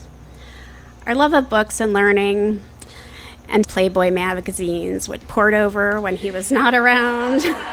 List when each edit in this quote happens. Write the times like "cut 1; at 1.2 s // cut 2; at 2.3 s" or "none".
cut 1; at 3.6 s // cut 2; at 5.2 s